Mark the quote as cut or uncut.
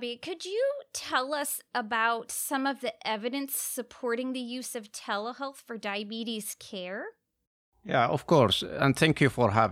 uncut